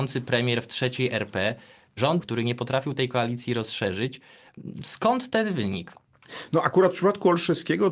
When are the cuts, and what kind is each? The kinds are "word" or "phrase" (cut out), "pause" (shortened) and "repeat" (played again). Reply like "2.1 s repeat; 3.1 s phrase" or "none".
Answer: 2.2 s word